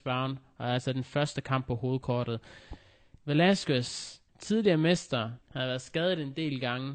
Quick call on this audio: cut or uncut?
cut